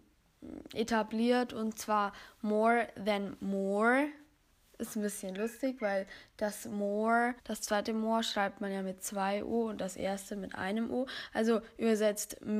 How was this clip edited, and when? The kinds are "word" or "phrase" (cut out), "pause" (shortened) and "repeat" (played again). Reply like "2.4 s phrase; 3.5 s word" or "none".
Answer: 7.4 s pause